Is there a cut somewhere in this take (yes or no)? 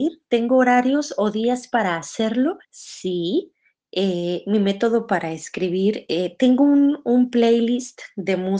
yes